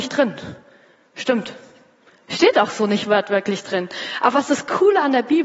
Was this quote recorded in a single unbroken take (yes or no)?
yes